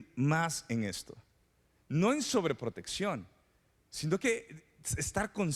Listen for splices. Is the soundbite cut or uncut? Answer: uncut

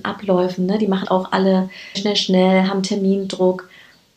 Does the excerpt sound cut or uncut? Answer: cut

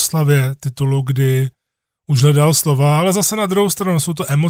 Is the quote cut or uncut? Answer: uncut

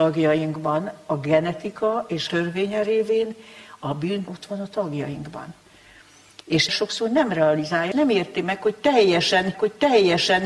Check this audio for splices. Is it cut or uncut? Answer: cut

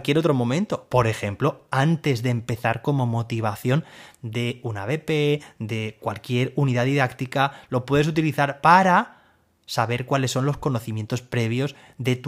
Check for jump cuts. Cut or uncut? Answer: uncut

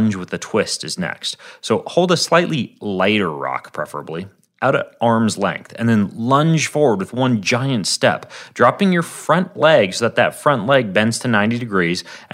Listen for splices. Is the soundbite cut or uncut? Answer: uncut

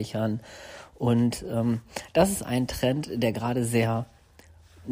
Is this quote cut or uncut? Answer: uncut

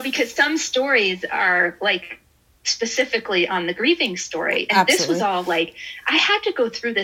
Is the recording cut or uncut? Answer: uncut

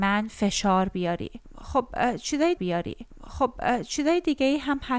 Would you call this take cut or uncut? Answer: cut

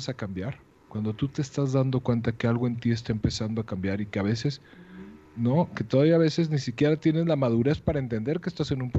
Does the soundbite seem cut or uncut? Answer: cut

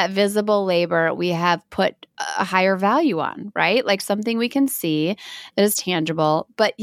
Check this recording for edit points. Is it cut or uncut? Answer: uncut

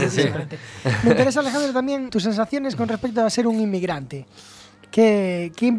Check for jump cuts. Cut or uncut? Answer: cut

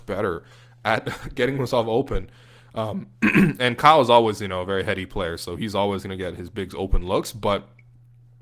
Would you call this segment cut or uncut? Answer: uncut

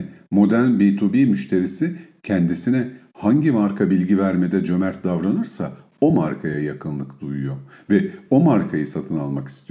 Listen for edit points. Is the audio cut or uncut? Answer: uncut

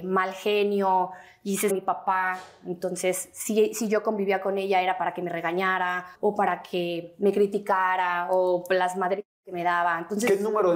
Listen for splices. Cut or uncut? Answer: cut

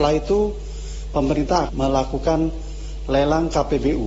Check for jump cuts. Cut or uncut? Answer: cut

